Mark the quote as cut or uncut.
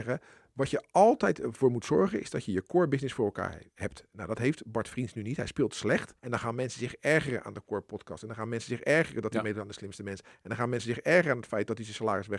cut